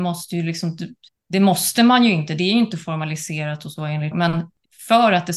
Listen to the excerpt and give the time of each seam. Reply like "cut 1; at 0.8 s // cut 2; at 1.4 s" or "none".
cut 1; at 4.1 s